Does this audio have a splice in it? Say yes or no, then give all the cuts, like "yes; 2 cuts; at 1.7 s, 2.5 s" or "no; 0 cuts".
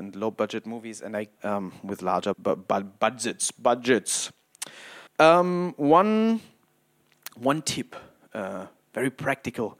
yes; 3 cuts; at 1.4 s, 2.3 s, 5.1 s